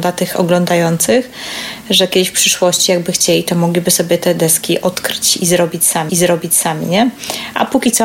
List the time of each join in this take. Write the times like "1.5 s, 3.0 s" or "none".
6.1 s